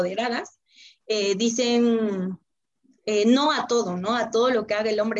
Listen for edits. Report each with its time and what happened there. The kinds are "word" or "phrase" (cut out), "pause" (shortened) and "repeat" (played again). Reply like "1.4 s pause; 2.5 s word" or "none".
none